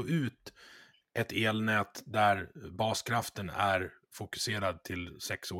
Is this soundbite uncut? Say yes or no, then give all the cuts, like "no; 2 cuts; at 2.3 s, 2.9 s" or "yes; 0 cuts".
yes; 0 cuts